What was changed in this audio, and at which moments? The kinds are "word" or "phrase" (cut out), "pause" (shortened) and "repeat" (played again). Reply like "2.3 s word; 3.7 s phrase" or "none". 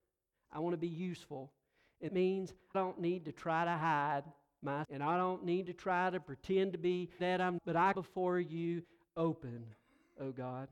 2.1 s word; 2.7 s word; 4.8 s word; 7.2 s word; 7.6 s word; 7.9 s word